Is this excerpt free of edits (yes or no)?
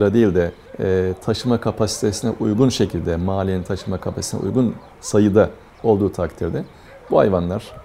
yes